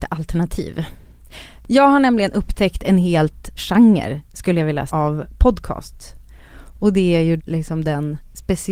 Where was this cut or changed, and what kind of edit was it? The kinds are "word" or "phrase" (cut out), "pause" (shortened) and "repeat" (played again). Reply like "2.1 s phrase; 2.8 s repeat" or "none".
3.6 s word; 4.9 s word; 7.4 s word